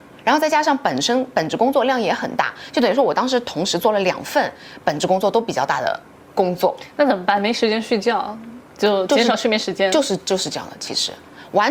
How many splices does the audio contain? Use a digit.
0